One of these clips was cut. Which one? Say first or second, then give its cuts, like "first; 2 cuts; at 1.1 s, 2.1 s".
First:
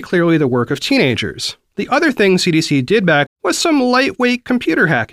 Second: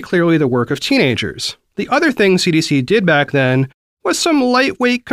first; 1 cut; at 3.3 s